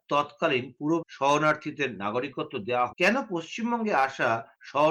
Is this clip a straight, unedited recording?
no; 2 cuts; at 1.0 s, 2.9 s

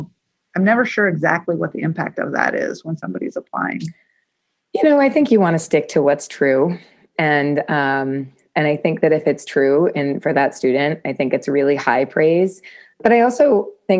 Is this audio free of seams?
yes; 0 cuts

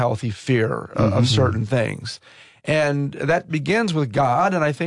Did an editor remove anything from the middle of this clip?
no; 0 cuts

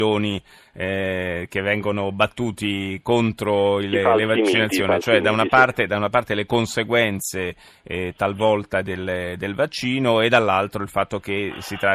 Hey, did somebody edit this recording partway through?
no; 0 cuts

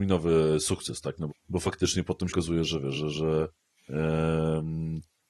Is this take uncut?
no; 3 cuts; at 1.3 s, 2.3 s, 2.9 s

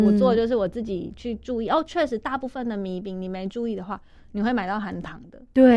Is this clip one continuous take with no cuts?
yes; 0 cuts

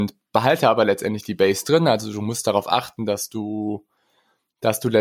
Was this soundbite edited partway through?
no; 0 cuts

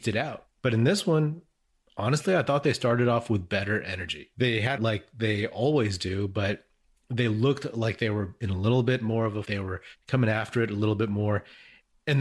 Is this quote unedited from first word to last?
no; 2 cuts; at 4.8 s, 9.4 s

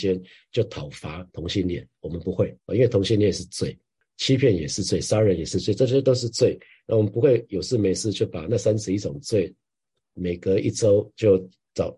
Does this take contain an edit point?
yes; 2 cuts; at 1.3 s, 2.6 s

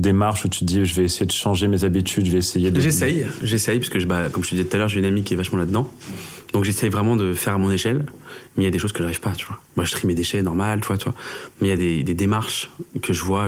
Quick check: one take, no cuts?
yes; 0 cuts

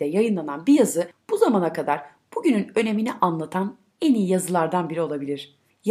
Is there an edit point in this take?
no; 0 cuts

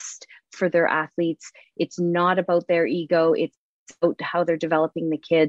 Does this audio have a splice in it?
no; 0 cuts

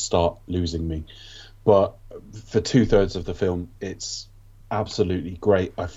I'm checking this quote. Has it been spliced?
no; 0 cuts

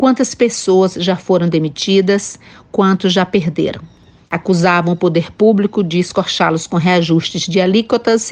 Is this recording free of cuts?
yes; 0 cuts

